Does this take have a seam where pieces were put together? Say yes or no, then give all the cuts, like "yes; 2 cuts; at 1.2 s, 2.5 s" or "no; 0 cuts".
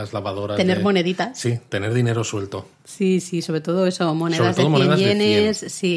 yes; 1 cut; at 3.2 s